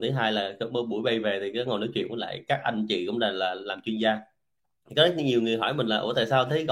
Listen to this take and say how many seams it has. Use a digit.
0